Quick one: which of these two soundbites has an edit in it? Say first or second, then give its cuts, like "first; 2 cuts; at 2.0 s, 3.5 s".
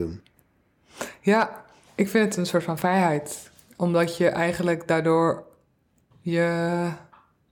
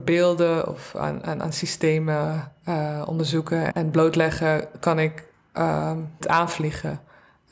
second; 2 cuts; at 3.7 s, 6.2 s